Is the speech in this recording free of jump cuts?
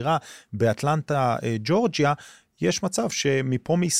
yes; 0 cuts

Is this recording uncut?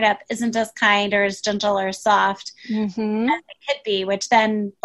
yes; 0 cuts

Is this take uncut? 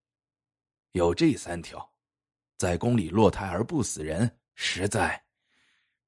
no; 1 cut; at 4.5 s

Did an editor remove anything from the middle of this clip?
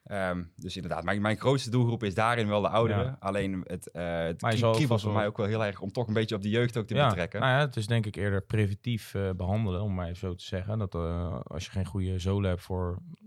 no; 0 cuts

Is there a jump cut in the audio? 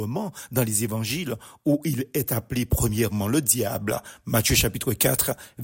no; 0 cuts

